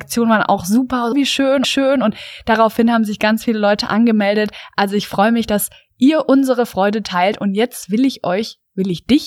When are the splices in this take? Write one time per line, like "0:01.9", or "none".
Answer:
0:01.1
0:01.6